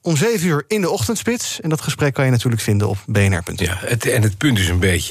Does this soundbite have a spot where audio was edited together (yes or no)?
no